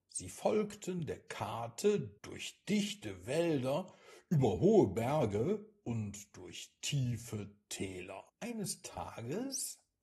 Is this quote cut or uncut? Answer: cut